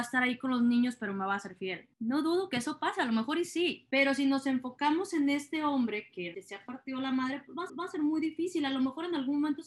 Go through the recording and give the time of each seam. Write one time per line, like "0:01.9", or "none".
0:06.3
0:07.7